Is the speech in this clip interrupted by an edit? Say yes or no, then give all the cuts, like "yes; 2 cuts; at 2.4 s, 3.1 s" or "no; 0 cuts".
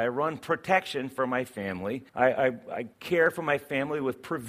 yes; 2 cuts; at 2.1 s, 2.9 s